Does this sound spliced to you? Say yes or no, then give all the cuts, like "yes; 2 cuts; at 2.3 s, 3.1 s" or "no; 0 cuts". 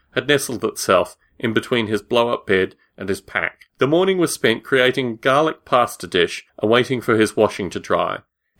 yes; 2 cuts; at 3.7 s, 6.5 s